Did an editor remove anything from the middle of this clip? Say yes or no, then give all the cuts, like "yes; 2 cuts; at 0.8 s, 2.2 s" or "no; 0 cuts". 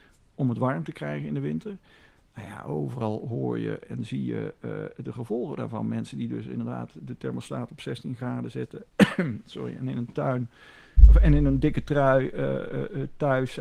no; 0 cuts